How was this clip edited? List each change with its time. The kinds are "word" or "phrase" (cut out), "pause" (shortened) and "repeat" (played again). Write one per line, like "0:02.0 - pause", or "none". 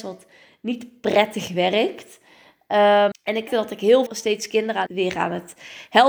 0:03.1 - word
0:03.5 - word
0:04.1 - word
0:04.9 - word

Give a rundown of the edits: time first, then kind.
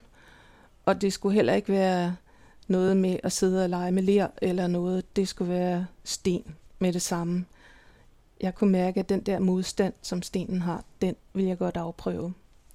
none

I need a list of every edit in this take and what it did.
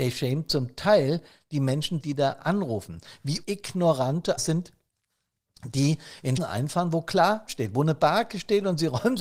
0:02.0 - word
0:03.4 - word
0:04.4 - word
0:06.4 - word
0:07.5 - word

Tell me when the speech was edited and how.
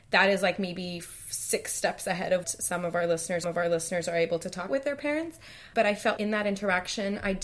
0:02.4 - word
0:03.4 - repeat
0:04.7 - word
0:05.7 - word
0:06.2 - word

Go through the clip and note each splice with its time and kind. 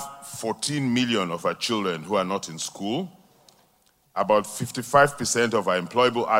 none

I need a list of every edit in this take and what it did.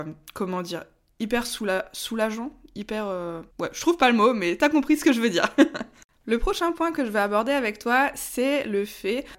0:03.5 - pause

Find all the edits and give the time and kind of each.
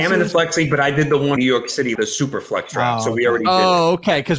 0:01.4 - word
0:01.9 - word

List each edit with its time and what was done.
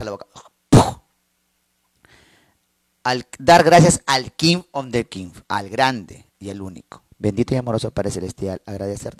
0:05.4 - pause
0:06.3 - pause
0:07.1 - pause

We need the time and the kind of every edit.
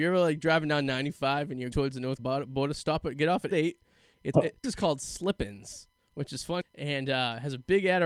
0:01.7 - word
0:02.2 - word
0:03.5 - word
0:04.3 - word
0:04.6 - word
0:06.6 - word

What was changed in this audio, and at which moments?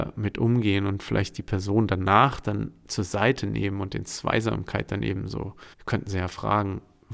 0:05.7 - pause

